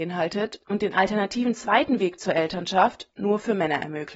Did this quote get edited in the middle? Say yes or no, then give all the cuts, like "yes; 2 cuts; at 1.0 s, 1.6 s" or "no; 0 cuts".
no; 0 cuts